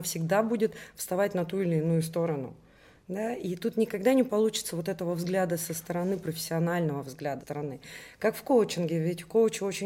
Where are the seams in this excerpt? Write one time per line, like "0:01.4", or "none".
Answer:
0:07.4

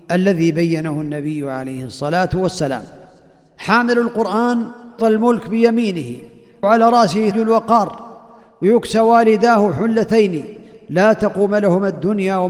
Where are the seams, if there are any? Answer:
0:05.0
0:06.6
0:07.3

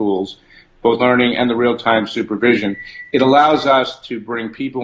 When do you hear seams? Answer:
0:01.0

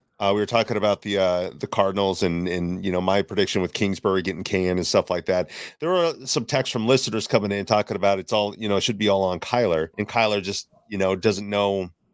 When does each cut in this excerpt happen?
0:09.9

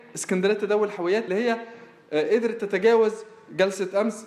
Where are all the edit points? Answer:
0:01.3

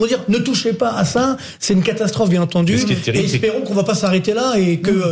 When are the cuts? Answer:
none

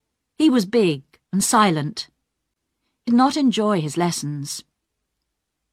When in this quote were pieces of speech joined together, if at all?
0:01.2
0:03.1

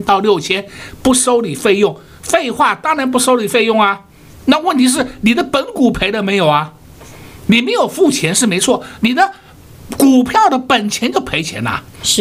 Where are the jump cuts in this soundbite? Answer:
none

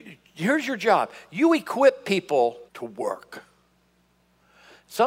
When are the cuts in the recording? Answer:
0:02.7

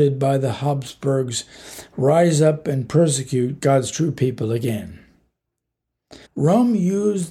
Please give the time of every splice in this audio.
0:06.2

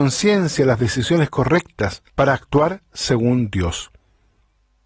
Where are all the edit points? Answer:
0:02.1

